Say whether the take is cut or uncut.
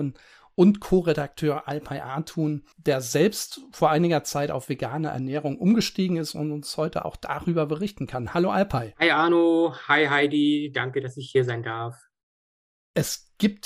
cut